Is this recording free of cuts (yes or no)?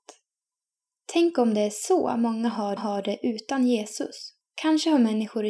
no